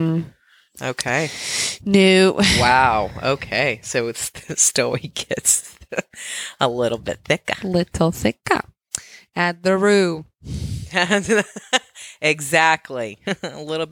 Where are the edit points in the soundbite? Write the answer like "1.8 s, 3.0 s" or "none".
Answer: none